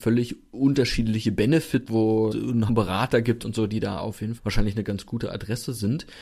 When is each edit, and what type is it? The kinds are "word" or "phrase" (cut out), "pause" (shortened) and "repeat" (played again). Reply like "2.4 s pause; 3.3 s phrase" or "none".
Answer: 1.9 s word; 2.3 s word; 2.7 s word; 4.4 s phrase